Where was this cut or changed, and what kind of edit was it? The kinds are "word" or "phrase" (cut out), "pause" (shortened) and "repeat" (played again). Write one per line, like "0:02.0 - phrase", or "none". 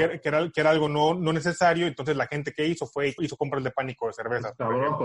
0:03.2 - word